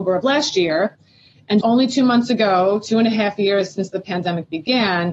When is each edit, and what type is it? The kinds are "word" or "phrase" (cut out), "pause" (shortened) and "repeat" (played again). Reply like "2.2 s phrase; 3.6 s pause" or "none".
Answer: 1.6 s word